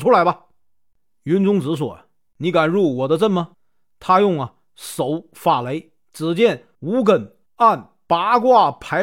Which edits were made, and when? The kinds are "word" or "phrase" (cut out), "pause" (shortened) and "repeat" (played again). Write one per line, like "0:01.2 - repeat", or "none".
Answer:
0:03.5 - pause
0:06.7 - pause
0:07.5 - pause